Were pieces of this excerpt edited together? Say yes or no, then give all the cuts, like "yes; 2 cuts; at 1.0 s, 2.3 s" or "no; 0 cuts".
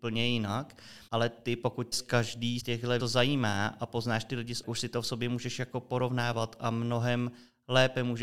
yes; 5 cuts; at 1.1 s, 1.9 s, 2.6 s, 3.0 s, 4.6 s